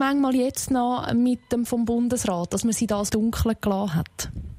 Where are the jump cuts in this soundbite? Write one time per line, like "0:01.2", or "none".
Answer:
0:01.7
0:03.1